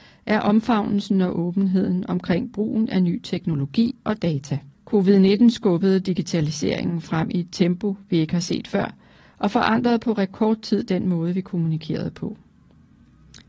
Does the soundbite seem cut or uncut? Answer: cut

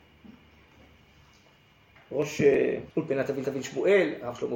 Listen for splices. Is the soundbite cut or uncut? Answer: cut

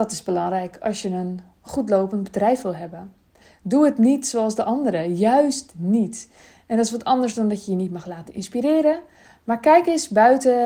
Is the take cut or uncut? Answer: uncut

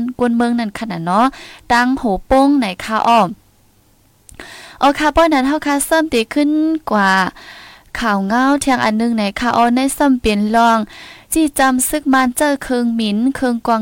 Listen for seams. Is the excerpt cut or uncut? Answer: cut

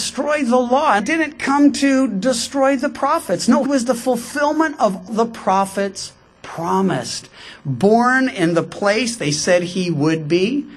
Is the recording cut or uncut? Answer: cut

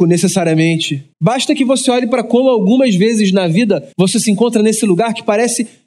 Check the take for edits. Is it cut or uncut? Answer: cut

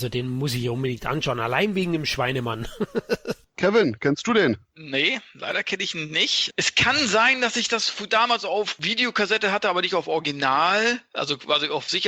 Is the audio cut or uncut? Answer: uncut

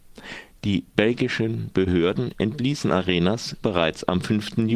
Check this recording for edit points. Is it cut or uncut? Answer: cut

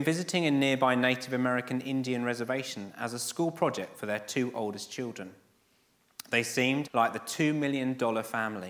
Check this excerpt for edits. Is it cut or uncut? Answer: cut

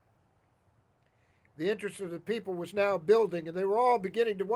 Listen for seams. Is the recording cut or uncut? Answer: uncut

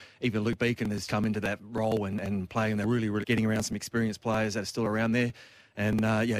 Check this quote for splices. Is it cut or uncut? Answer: cut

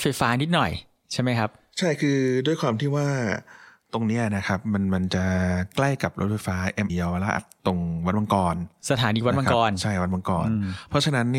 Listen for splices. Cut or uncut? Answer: cut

